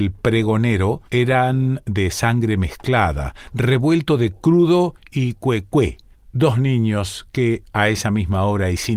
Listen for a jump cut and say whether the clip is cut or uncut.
cut